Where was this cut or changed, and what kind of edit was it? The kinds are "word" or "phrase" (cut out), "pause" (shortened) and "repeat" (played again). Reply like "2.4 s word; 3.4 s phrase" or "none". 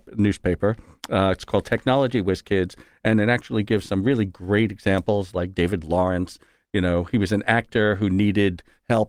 none